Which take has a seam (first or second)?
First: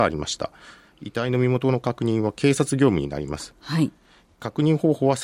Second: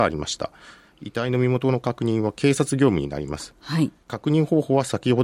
second